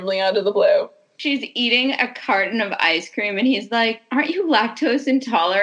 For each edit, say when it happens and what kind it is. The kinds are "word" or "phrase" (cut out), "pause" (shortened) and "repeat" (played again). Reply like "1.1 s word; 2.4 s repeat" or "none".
none